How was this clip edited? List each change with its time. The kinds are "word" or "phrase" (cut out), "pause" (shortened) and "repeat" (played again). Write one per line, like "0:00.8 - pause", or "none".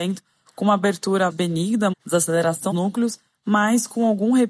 0:01.3 - word
0:01.9 - word
0:02.7 - word